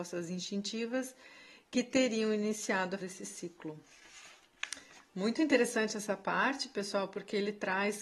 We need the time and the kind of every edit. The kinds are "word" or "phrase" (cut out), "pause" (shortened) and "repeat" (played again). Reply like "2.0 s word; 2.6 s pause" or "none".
3.0 s word